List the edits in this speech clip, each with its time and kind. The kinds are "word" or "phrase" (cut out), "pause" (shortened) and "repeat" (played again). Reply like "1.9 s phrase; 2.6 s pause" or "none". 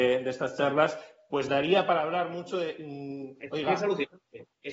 none